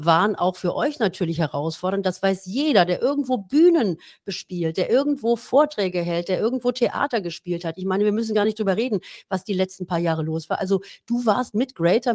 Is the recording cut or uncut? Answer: uncut